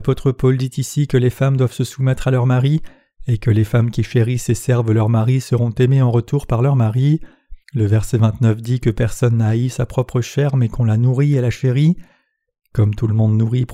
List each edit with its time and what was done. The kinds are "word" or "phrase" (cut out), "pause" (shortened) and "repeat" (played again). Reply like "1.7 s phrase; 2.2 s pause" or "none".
7.6 s pause